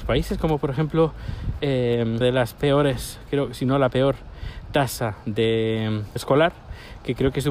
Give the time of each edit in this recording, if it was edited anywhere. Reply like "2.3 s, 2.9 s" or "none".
2.2 s, 6.2 s